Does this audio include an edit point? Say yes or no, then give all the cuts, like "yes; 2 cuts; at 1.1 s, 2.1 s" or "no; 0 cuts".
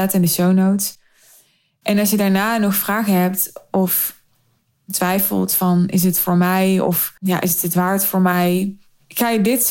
yes; 1 cut; at 7.2 s